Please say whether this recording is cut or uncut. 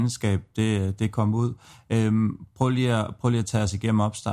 uncut